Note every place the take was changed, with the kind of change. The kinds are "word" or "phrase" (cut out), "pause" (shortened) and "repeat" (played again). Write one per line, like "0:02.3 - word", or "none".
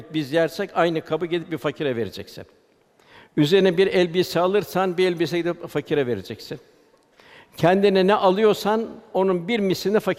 none